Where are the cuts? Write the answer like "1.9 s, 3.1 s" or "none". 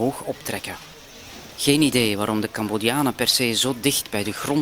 none